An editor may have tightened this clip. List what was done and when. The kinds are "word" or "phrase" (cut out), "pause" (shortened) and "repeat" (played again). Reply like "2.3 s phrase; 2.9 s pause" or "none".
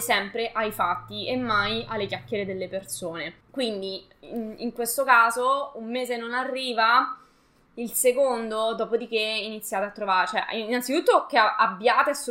3.4 s pause